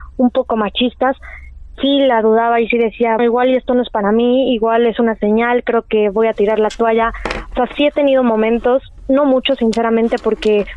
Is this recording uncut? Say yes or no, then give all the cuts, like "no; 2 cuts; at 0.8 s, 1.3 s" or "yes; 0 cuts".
no; 1 cut; at 3.2 s